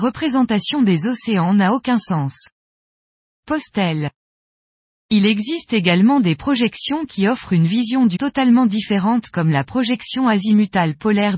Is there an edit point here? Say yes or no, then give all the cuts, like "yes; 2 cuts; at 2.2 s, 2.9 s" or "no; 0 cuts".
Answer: yes; 1 cut; at 8.2 s